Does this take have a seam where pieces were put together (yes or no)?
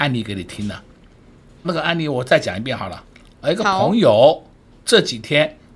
yes